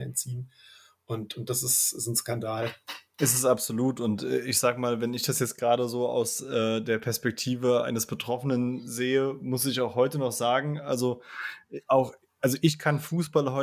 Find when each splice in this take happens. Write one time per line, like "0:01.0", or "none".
none